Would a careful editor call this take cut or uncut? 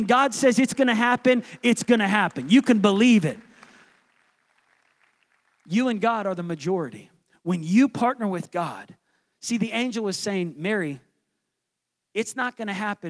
uncut